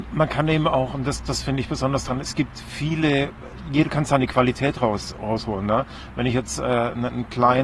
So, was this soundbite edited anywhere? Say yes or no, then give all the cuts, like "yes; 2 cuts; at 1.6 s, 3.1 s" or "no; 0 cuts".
no; 0 cuts